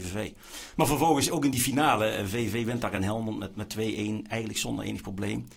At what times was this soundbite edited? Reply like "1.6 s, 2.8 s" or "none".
none